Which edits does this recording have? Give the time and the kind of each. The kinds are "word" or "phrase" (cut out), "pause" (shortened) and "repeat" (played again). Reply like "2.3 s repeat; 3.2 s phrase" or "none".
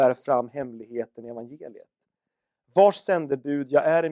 none

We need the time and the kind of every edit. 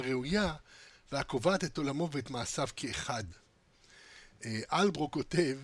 0.9 s word

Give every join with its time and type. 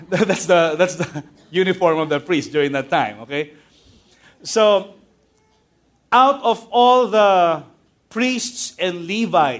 none

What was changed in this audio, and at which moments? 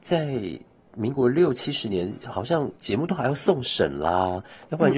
2.7 s pause

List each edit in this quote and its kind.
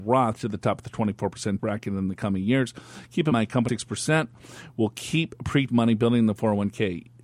1.6 s word; 3.3 s word; 3.7 s word; 5.7 s word

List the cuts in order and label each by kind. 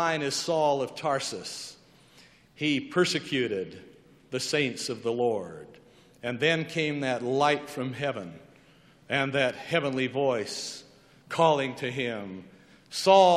none

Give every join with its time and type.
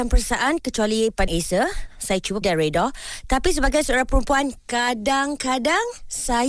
1.3 s word; 2.4 s word

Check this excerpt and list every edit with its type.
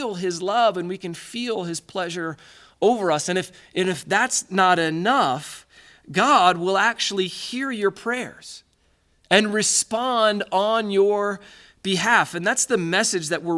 none

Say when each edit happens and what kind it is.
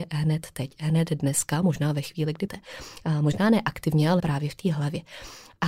2.5 s word; 4.2 s word

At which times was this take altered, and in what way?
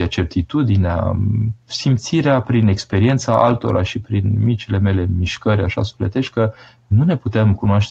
1.6 s pause

